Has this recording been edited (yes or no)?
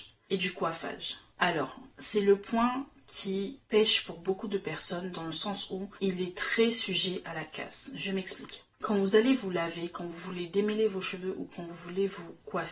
yes